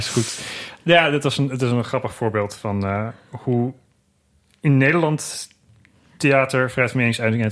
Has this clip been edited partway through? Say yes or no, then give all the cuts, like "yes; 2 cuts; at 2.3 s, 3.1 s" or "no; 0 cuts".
no; 0 cuts